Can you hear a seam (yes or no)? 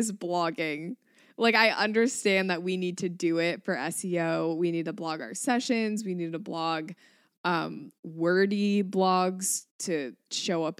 no